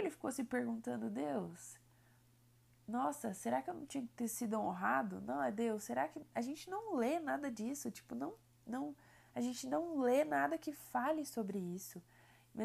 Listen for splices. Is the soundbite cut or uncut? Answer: uncut